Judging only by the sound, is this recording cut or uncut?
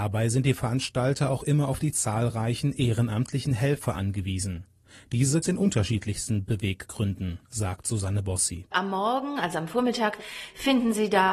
cut